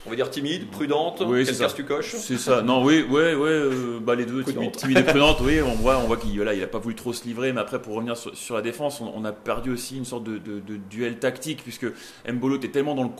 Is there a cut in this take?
no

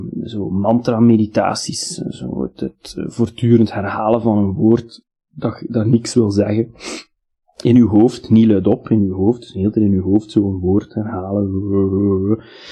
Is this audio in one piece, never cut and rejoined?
yes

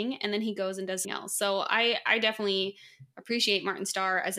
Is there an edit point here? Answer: yes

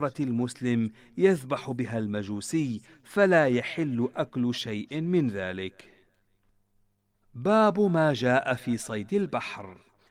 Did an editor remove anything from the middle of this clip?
no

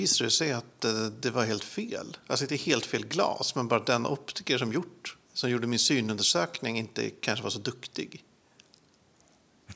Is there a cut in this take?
yes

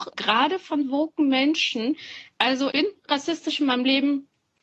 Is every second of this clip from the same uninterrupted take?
no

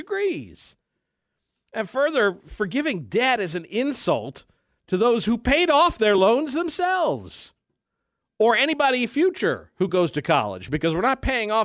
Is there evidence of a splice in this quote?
no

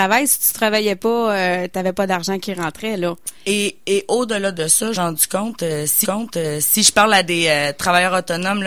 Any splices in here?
yes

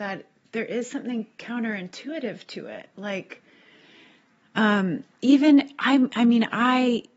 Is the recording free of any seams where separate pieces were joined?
yes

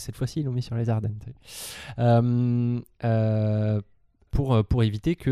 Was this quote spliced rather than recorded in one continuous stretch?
yes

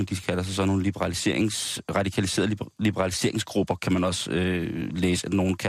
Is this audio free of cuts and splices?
yes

